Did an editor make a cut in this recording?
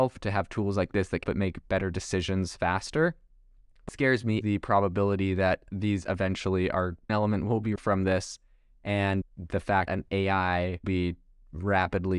yes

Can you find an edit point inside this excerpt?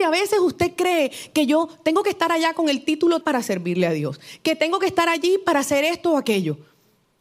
yes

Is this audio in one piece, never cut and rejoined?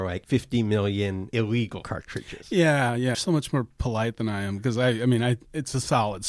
no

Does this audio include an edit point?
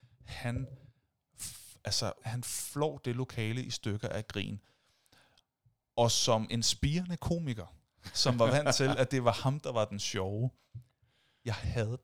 yes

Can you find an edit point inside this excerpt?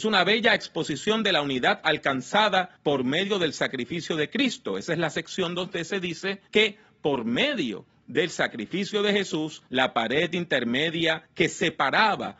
yes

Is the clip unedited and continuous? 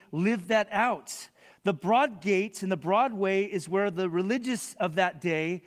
yes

